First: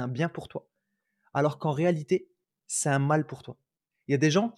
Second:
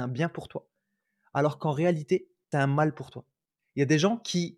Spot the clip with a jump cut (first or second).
second